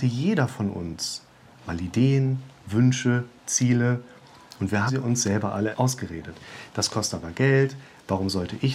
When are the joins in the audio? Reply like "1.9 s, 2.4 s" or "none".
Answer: 4.9 s, 5.7 s